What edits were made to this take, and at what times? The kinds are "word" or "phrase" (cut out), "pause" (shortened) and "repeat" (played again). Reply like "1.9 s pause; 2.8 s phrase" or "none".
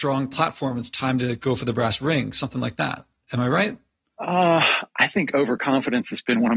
none